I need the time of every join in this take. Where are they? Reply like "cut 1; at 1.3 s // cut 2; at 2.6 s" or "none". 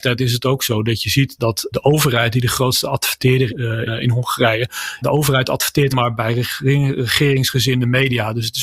cut 1; at 1.4 s // cut 2; at 1.7 s // cut 3; at 3.5 s // cut 4; at 3.9 s // cut 5; at 5.0 s // cut 6; at 5.9 s